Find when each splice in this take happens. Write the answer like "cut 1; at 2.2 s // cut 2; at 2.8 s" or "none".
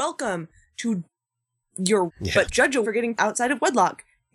cut 1; at 2.1 s // cut 2; at 2.5 s // cut 3; at 2.8 s // cut 4; at 3.1 s